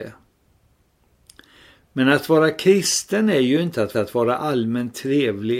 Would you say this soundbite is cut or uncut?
cut